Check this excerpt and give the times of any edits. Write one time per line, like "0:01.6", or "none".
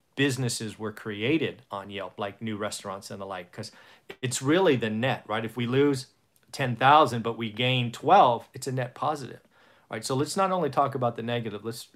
none